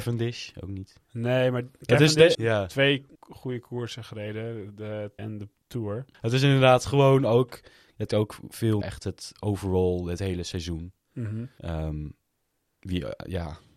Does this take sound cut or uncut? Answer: cut